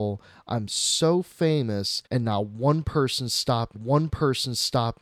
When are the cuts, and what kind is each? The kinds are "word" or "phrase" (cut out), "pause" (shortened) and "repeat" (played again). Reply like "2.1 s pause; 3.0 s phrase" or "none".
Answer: 2.0 s pause; 3.7 s repeat